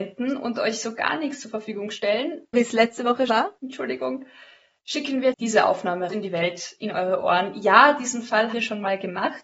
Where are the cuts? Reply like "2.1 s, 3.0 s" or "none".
2.5 s, 3.3 s, 5.3 s, 6.1 s, 8.5 s